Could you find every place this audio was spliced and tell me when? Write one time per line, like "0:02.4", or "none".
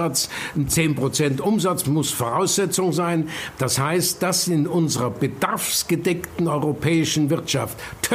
0:01.8
0:04.4

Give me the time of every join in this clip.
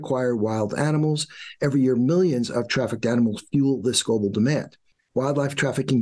none

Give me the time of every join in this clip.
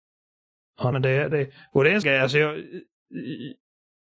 0:00.9
0:01.3
0:02.0

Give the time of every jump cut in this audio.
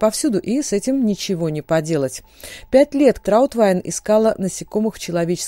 0:03.2

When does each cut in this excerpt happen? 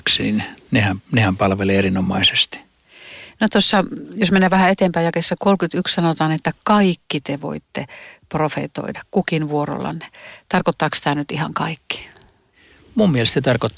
none

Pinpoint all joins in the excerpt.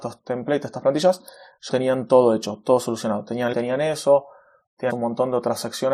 0:01.7
0:03.5
0:04.9

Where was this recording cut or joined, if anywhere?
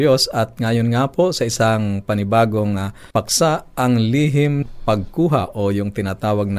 0:03.1
0:04.6

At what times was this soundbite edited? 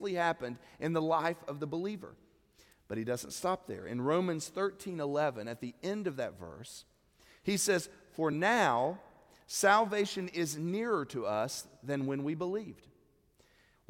none

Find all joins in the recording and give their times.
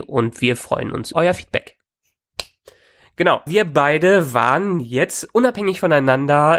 0:01.1
0:03.5

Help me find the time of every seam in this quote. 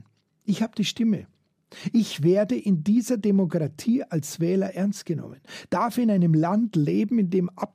none

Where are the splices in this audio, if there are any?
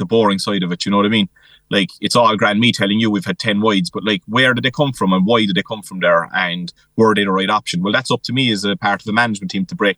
none

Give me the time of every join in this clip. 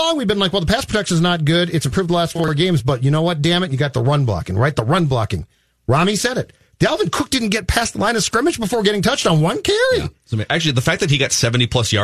none

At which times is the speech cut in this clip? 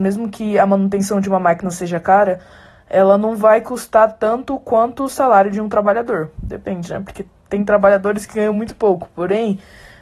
none

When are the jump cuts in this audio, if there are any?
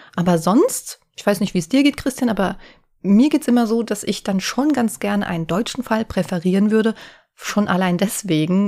none

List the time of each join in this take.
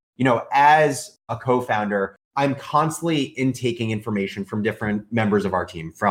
0:02.2

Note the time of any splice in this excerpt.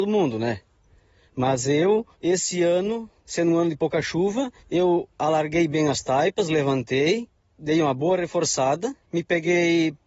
0:02.1
0:03.2
0:04.6
0:09.0

